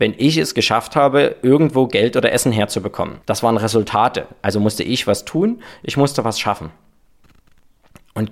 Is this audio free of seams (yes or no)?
no